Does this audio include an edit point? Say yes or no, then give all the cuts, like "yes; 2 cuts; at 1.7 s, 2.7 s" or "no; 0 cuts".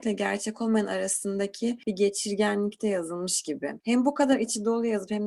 no; 0 cuts